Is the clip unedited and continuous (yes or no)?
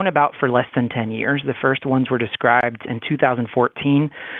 yes